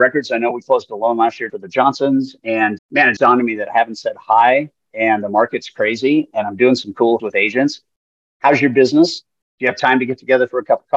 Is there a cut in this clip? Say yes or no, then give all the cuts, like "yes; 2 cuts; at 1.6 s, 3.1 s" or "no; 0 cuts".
yes; 4 cuts; at 1.5 s, 2.8 s, 3.2 s, 7.2 s